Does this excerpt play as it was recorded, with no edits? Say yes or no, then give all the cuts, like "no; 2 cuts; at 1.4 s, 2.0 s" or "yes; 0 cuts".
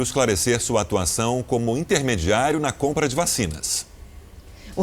yes; 0 cuts